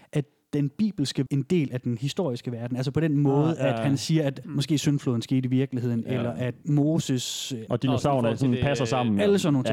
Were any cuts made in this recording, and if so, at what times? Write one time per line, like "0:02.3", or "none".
0:01.3